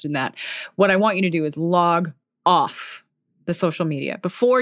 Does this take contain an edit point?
no; 0 cuts

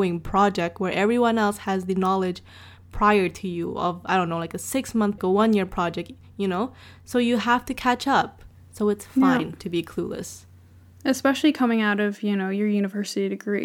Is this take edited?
yes; 1 cut; at 5.2 s

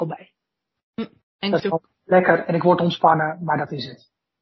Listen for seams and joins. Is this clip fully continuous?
no; 2 cuts; at 1.2 s, 1.6 s

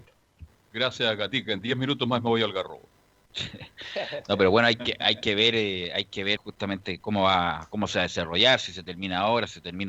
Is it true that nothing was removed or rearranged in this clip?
no; 1 cut; at 6.4 s

